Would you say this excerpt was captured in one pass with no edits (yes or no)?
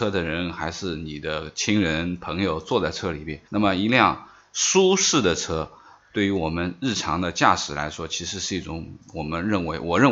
no